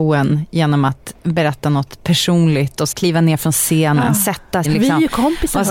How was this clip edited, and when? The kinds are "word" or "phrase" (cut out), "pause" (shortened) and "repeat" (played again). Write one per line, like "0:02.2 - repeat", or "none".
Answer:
0:02.9 - phrase
0:04.6 - word